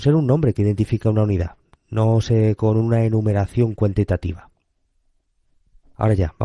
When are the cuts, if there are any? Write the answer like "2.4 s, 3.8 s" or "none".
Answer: 2.6 s

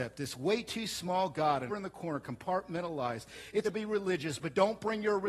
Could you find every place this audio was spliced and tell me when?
1.7 s, 3.6 s

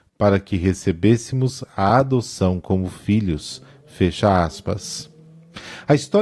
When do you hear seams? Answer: none

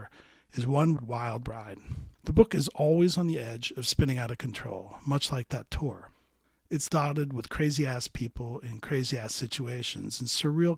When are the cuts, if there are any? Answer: 1.0 s, 2.1 s, 6.9 s

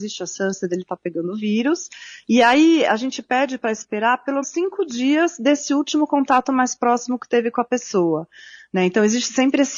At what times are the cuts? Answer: 4.4 s

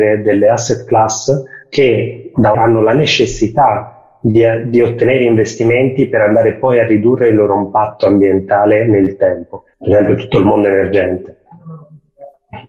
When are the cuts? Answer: 2.5 s, 9.7 s

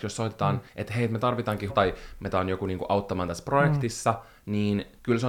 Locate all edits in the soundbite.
1.7 s, 2.3 s

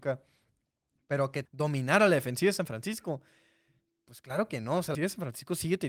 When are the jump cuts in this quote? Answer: 1.4 s, 4.9 s

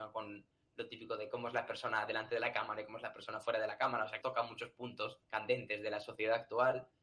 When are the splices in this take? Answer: 4.2 s, 5.2 s

